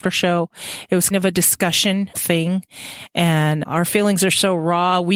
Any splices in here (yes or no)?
yes